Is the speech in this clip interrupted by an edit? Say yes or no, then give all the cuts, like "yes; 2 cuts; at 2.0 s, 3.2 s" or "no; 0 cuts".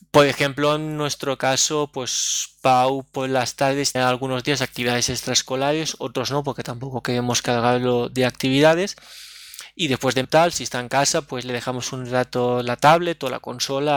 yes; 2 cuts; at 3.9 s, 10.2 s